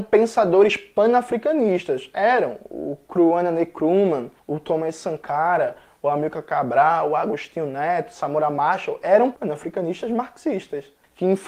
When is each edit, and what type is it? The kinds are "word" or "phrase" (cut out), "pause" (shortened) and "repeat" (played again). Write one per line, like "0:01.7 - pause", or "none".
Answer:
0:09.3 - word